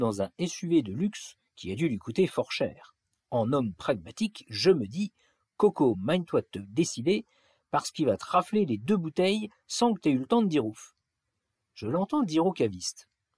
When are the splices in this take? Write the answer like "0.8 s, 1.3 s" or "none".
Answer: none